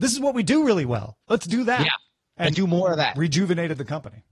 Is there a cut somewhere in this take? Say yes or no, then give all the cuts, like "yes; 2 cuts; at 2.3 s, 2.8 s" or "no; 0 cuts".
yes; 2 cuts; at 1.2 s, 2.5 s